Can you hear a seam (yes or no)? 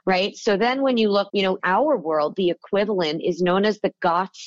yes